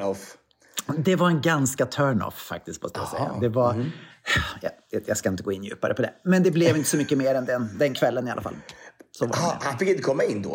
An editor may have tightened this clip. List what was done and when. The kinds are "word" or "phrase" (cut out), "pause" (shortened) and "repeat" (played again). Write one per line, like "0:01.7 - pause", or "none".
none